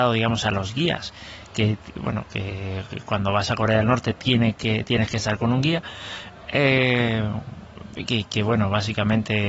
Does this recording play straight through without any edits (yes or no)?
yes